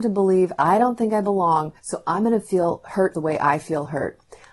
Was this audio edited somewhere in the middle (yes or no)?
yes